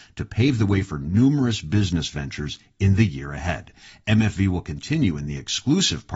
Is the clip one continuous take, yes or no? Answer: yes